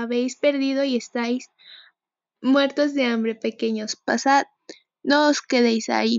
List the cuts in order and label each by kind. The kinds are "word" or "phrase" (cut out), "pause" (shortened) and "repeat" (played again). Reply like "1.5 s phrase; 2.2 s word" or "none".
none